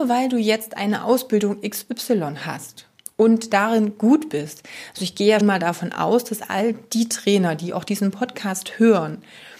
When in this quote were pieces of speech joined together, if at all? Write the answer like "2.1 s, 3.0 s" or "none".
5.4 s